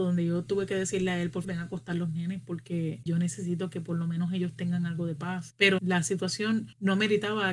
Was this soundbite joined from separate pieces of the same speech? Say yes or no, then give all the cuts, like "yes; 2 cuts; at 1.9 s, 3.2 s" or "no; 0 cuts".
yes; 3 cuts; at 1.4 s, 3.1 s, 5.8 s